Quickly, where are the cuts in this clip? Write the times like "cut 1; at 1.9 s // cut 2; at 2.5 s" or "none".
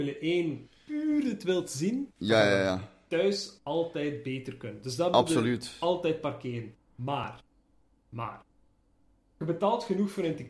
none